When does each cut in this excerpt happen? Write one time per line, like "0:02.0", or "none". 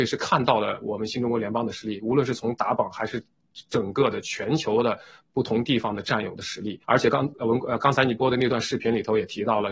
0:06.8

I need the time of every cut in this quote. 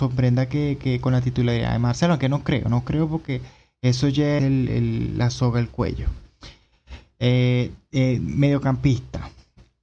0:04.4

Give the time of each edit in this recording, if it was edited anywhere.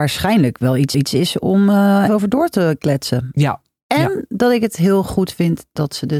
0:00.9
0:02.1

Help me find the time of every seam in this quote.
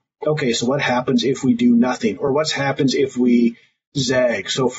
none

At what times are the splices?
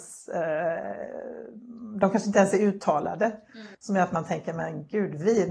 0:03.7

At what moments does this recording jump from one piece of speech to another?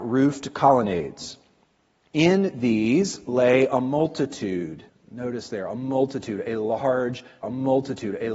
0:04.9
0:07.4

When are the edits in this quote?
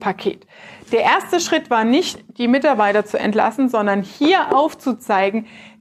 none

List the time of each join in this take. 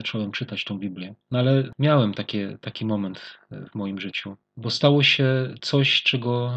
0:01.2

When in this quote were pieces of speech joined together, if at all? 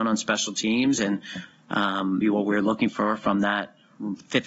0:02.2

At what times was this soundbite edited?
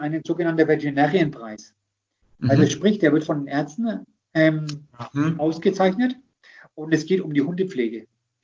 none

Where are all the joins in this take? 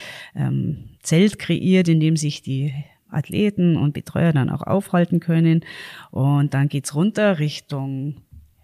0:00.9
0:03.0

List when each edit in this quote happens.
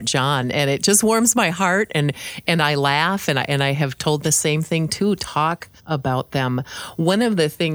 0:04.2
0:05.8

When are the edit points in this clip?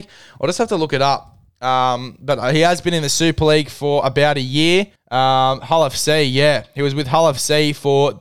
0:05.0

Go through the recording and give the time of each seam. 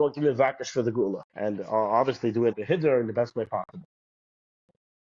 0:01.3
0:02.5

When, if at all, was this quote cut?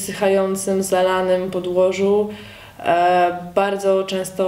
none

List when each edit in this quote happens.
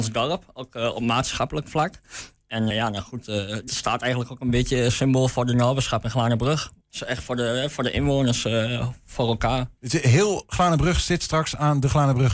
0:02.7
0:03.7
0:06.8
0:09.8

